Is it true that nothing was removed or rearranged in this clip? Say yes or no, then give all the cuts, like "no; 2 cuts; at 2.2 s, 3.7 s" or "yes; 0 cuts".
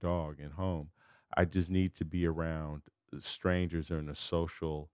yes; 0 cuts